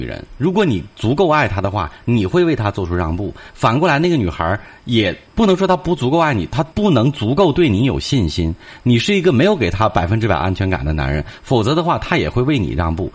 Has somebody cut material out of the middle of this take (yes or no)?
yes